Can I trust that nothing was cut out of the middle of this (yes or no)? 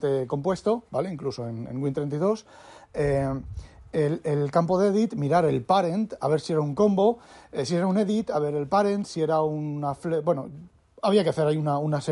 yes